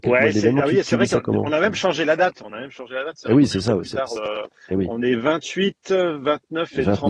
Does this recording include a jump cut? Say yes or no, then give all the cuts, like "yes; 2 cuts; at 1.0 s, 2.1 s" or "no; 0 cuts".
no; 0 cuts